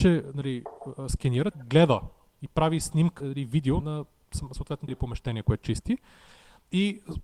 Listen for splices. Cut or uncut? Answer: cut